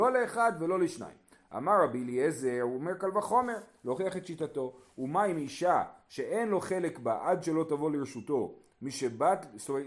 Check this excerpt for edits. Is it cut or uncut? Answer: uncut